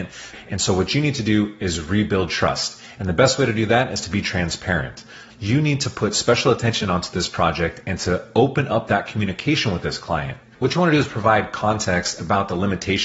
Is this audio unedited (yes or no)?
yes